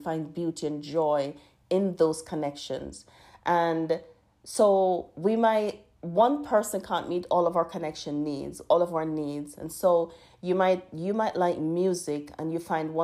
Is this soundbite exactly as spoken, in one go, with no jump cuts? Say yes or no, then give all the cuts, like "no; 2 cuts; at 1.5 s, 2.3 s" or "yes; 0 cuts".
yes; 0 cuts